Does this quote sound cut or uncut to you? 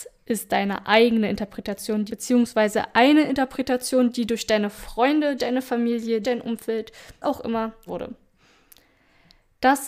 cut